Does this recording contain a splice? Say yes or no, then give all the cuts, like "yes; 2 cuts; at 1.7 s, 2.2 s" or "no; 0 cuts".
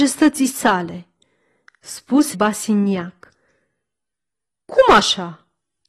yes; 1 cut; at 2.3 s